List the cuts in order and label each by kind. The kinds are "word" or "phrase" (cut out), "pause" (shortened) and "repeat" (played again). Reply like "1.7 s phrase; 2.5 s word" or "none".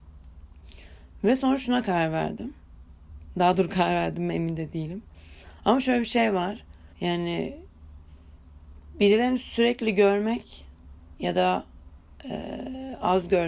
6.9 s pause